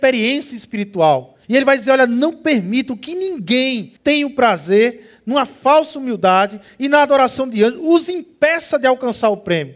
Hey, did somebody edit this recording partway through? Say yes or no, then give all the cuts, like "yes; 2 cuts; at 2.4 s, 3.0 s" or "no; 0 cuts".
yes; 2 cuts; at 1.4 s, 4.0 s